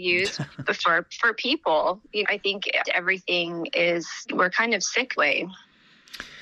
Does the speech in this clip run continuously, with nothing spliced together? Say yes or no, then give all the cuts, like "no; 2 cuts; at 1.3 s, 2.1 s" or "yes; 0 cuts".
no; 4 cuts; at 2.2 s, 2.8 s, 4.3 s, 5.2 s